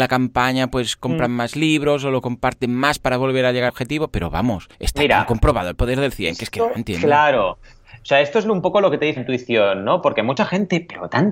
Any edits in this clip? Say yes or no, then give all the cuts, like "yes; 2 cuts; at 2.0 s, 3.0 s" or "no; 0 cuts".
yes; 3 cuts; at 3.7 s, 4.7 s, 9.2 s